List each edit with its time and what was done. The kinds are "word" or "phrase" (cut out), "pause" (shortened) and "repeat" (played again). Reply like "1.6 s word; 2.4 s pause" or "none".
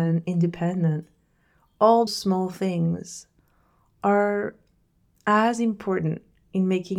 2.1 s word

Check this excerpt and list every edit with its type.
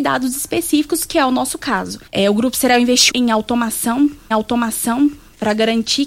2.1 s pause; 3.1 s word; 4.3 s repeat

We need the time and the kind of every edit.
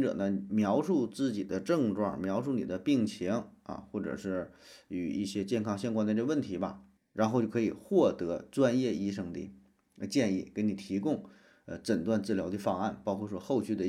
7.0 s word

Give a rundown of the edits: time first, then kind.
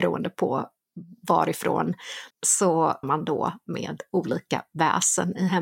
2.3 s phrase; 3.0 s word

